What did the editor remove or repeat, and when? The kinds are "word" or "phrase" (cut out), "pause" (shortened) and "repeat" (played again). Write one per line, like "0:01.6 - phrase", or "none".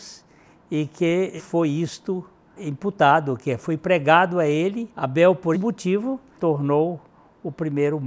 0:01.4 - word
0:02.6 - word
0:03.6 - word
0:04.9 - pause
0:05.5 - word
0:06.3 - word